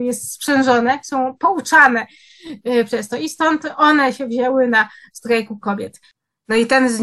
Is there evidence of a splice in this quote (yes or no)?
no